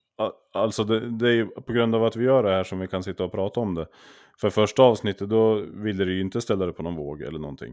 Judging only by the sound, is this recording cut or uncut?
uncut